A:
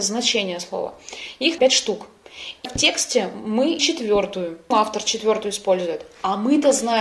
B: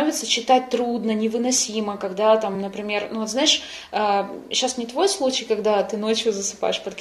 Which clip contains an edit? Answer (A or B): A